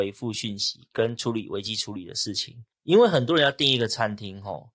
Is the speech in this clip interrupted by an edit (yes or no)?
yes